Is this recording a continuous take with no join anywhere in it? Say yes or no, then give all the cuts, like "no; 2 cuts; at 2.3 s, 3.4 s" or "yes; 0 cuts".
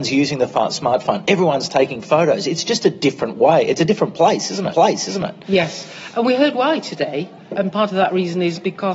no; 2 cuts; at 4.7 s, 7.4 s